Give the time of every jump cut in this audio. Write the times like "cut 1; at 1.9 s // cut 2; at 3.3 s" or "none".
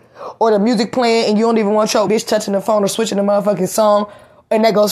cut 1; at 2.1 s